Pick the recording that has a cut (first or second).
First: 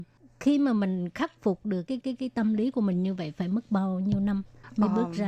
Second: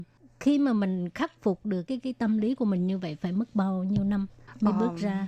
first